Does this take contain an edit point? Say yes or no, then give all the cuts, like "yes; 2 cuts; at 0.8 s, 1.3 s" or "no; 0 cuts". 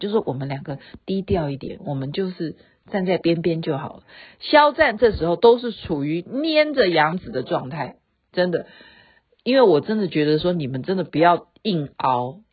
no; 0 cuts